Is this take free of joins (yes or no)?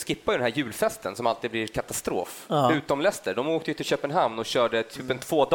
yes